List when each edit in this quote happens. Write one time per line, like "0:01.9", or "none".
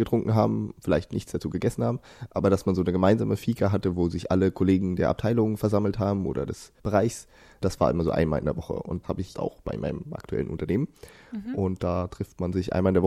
0:06.8
0:09.0
0:09.3